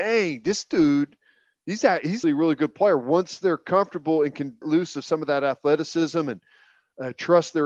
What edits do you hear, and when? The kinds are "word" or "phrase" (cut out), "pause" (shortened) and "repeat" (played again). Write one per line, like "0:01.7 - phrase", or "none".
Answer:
0:02.2 - word
0:04.6 - word